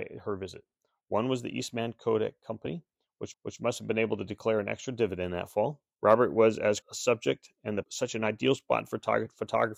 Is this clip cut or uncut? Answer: cut